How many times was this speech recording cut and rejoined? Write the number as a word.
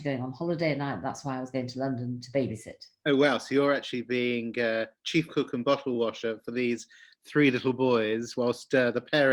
zero